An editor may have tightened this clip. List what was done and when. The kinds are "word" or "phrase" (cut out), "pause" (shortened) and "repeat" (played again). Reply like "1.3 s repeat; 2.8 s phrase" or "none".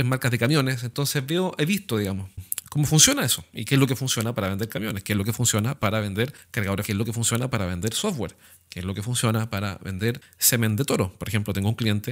6.8 s word